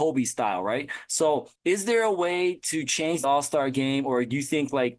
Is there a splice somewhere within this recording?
yes; 2 cuts; at 1.5 s, 3.2 s

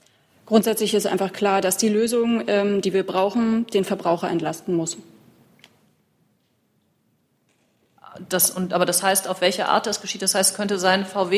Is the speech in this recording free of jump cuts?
yes; 0 cuts

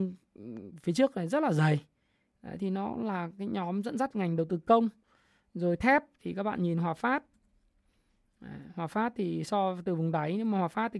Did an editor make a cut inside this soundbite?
no; 0 cuts

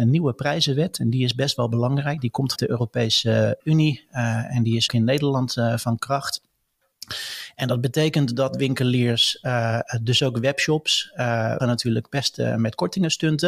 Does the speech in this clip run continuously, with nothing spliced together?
no; 4 cuts; at 2.6 s, 3.6 s, 4.9 s, 11.6 s

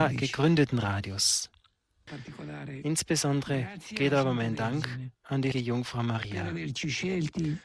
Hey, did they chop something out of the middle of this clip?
yes; 1 cut; at 5.5 s

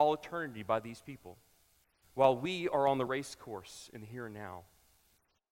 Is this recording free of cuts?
yes; 0 cuts

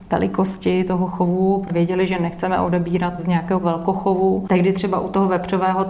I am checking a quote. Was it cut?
yes; 3 cuts; at 1.7 s, 3.2 s, 3.6 s

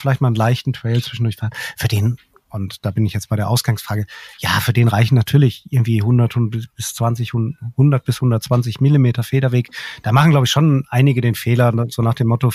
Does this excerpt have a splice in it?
no; 0 cuts

